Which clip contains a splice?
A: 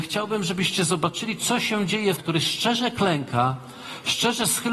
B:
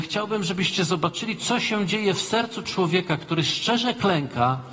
A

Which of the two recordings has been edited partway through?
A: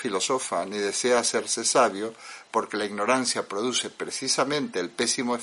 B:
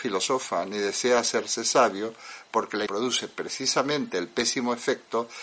B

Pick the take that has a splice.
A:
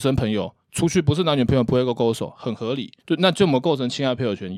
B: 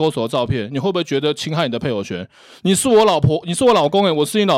A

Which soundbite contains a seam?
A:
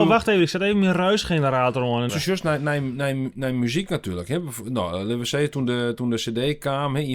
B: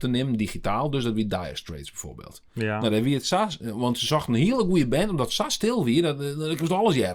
A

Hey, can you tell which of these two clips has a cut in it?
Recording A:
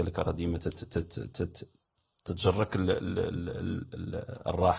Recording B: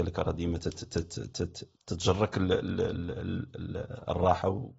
B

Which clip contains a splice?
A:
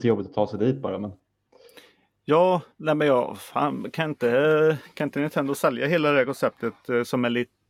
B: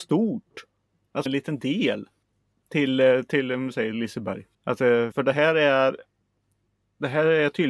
B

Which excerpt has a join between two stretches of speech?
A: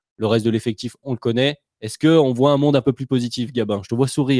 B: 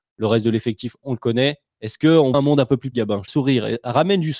B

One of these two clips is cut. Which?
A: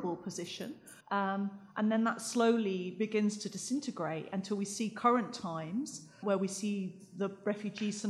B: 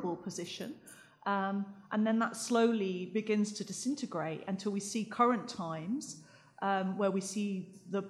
A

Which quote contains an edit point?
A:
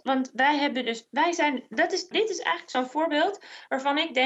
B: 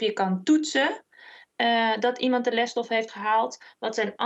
A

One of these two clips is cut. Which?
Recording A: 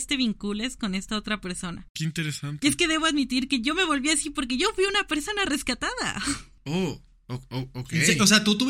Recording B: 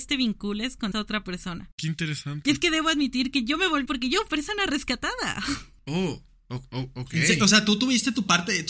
B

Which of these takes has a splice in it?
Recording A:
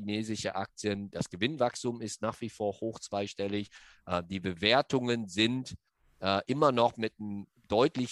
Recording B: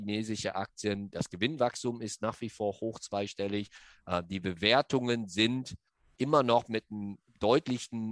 B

